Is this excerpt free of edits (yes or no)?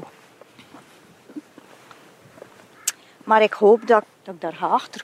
yes